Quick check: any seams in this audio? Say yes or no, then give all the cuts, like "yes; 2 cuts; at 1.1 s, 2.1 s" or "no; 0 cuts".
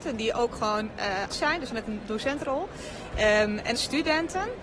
yes; 3 cuts; at 1.3 s, 1.7 s, 3.7 s